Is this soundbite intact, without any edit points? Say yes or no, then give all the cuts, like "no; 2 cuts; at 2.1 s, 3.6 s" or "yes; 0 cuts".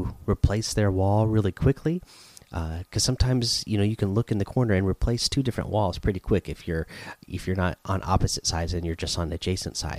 yes; 0 cuts